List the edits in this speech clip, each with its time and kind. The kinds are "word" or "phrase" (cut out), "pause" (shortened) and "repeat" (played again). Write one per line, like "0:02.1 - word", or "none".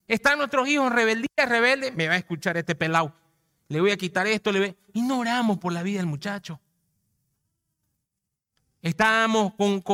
none